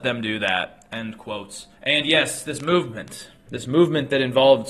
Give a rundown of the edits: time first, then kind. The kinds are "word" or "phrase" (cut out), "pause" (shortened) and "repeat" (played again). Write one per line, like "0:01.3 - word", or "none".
0:01.8 - pause